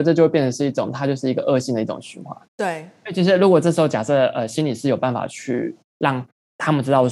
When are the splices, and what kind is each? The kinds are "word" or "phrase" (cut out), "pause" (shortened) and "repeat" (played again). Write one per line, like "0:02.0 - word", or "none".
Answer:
0:02.4 - pause

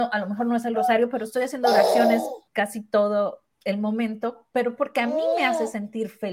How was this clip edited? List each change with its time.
0:02.5 - pause
0:03.5 - pause

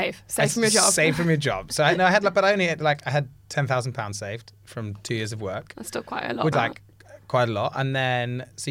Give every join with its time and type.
0:06.5 - word

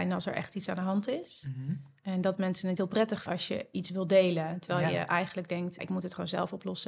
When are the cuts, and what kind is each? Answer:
0:02.8 - word
0:03.3 - word
0:05.8 - word

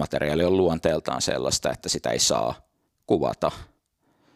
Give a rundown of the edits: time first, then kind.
none

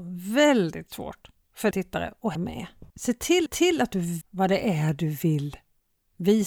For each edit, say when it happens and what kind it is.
0:01.7 - word
0:02.3 - word
0:02.9 - pause
0:03.5 - repeat
0:04.2 - word

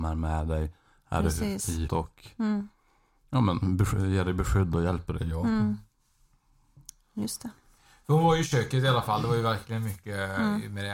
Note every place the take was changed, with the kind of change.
0:01.9 - word

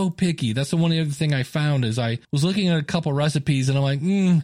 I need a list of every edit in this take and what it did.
0:02.2 - pause

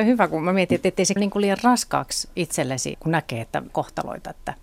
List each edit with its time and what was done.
0:01.2 - word
0:02.9 - word
0:03.7 - word

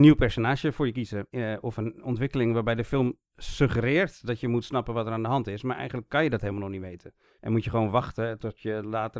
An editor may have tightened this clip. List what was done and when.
none

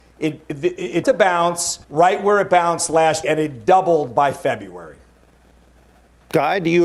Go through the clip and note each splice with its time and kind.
0:01.0 - word
0:01.8 - pause
0:03.2 - word

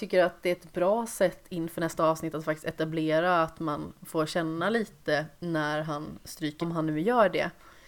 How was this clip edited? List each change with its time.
0:06.6 - word

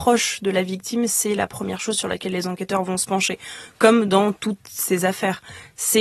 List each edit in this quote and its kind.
none

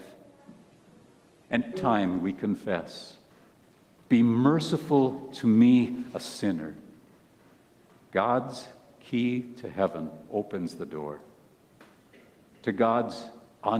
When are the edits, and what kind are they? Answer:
0:01.7 - word

